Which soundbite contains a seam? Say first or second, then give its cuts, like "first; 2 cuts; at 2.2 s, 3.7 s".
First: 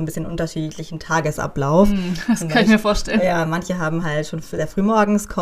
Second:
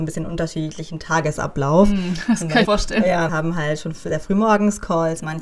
second; 2 cuts; at 2.6 s, 3.3 s